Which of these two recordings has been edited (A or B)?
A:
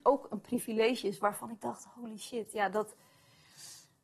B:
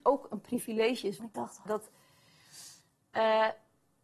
B